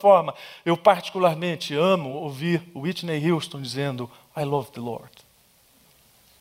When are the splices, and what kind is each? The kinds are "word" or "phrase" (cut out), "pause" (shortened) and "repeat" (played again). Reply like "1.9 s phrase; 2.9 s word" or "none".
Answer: none

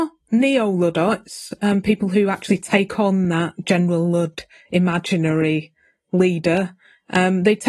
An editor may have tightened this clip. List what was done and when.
none

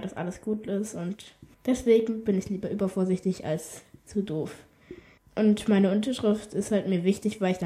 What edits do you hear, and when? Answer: 1.5 s pause; 5.2 s pause

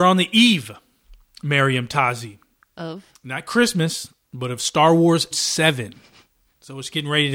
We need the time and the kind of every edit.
3.1 s pause; 4.2 s pause; 5.3 s word

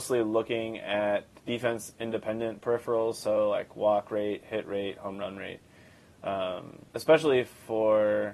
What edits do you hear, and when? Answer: 6.9 s pause

